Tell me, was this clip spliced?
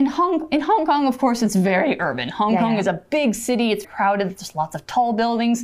yes; 1 cut; at 3.8 s

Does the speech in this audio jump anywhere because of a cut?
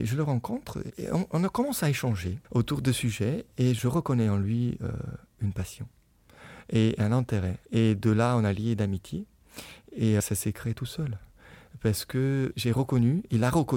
yes; 3 cuts; at 2.4 s, 7.7 s, 10.2 s

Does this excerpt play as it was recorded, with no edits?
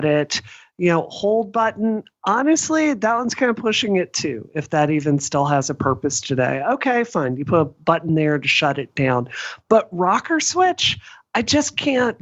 yes; 0 cuts

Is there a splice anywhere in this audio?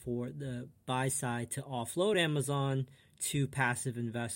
no; 0 cuts

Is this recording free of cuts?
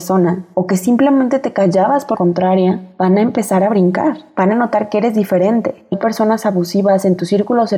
no; 3 cuts; at 2.1 s, 4.5 s, 5.9 s

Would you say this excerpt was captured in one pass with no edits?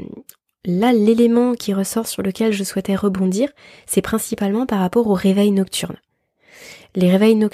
no; 1 cut; at 1.6 s

